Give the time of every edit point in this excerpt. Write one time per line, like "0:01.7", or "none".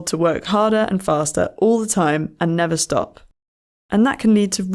none